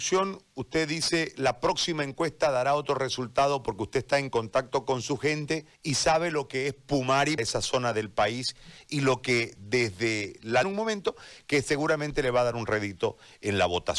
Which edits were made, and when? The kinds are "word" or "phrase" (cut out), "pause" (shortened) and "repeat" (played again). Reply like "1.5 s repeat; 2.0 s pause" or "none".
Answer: 5.7 s pause; 7.4 s word; 10.6 s phrase